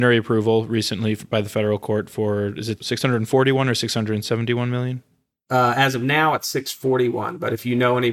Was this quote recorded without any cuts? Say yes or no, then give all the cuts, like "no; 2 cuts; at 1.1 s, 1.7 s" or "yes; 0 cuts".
yes; 0 cuts